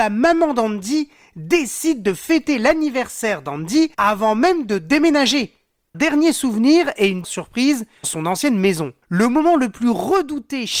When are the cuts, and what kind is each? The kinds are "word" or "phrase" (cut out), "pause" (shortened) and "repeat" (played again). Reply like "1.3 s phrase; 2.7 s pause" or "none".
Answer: 3.9 s pause; 5.9 s phrase; 7.2 s word; 8.0 s word; 9.0 s pause